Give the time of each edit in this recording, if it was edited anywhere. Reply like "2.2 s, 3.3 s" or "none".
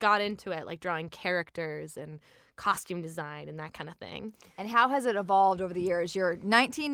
none